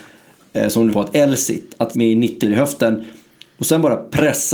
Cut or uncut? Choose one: cut